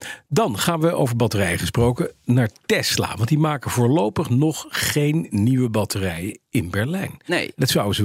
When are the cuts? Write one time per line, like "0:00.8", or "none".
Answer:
none